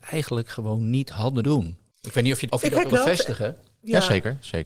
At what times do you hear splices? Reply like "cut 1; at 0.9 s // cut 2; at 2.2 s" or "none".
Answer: cut 1; at 1.4 s // cut 2; at 2.5 s // cut 3; at 2.9 s